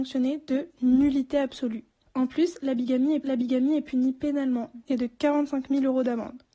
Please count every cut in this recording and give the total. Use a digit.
3